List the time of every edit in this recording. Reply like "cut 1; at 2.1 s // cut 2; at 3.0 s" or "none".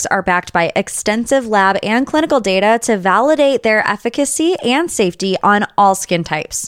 none